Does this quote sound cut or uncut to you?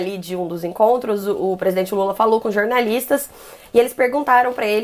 uncut